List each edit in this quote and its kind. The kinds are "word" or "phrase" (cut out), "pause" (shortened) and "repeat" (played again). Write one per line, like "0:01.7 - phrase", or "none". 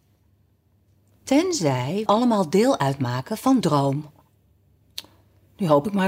0:02.1 - word
0:03.6 - word